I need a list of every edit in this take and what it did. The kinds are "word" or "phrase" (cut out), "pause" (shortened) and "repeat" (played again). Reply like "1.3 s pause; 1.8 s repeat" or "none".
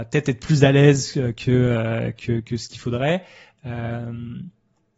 none

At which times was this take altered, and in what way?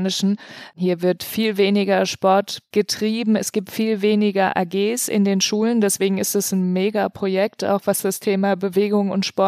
none

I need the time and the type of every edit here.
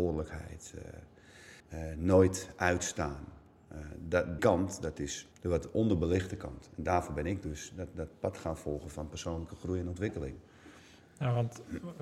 1.6 s pause; 4.4 s word; 5.3 s pause

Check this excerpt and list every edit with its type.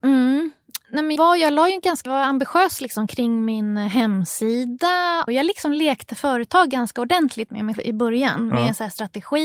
1.2 s word; 2.1 s word; 5.3 s word; 7.7 s word

